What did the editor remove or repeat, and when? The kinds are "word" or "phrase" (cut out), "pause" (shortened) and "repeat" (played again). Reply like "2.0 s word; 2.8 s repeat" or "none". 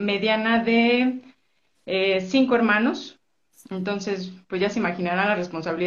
none